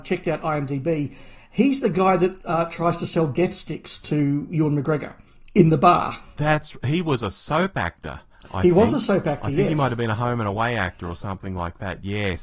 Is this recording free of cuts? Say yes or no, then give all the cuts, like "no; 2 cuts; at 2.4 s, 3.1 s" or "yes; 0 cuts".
yes; 0 cuts